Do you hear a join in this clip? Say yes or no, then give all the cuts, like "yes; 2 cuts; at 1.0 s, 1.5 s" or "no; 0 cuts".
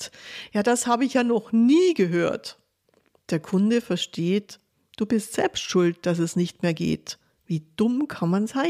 no; 0 cuts